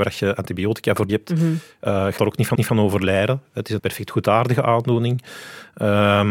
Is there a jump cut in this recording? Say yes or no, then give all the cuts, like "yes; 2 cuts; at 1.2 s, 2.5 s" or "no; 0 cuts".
yes; 4 cuts; at 1.1 s, 2.2 s, 2.5 s, 3.8 s